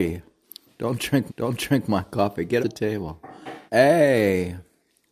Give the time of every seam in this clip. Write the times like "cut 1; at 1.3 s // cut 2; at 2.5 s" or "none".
cut 1; at 1.3 s // cut 2; at 2.6 s // cut 3; at 3.7 s